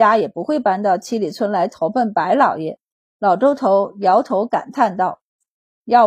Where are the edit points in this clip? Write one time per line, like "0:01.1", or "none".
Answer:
0:02.9